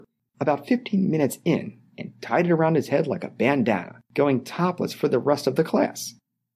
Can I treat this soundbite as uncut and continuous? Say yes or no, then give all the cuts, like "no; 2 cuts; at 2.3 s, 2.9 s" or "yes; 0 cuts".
no; 1 cut; at 4.0 s